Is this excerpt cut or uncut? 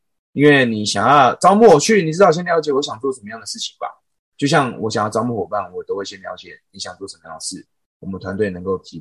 uncut